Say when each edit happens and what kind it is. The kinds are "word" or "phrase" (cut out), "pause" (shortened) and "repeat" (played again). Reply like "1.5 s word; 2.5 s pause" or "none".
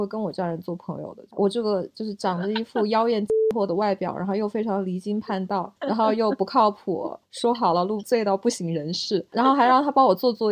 8.0 s word